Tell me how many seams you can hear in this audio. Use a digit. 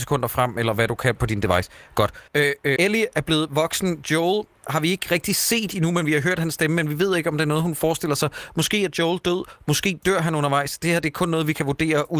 2